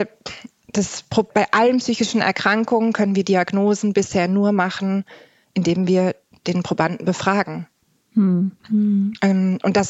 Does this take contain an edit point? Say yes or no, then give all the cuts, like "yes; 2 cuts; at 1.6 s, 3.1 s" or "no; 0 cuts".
yes; 2 cuts; at 1.3 s, 8.6 s